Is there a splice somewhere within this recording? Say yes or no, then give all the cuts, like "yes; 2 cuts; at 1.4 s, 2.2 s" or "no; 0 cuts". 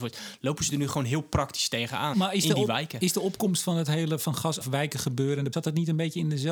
yes; 3 cuts; at 2.1 s, 4.6 s, 5.5 s